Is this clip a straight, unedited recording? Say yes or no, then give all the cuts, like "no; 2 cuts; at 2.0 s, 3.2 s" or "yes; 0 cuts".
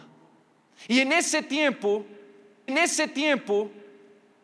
no; 1 cut; at 2.7 s